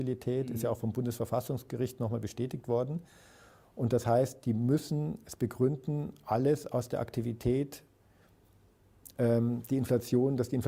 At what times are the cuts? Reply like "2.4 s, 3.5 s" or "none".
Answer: none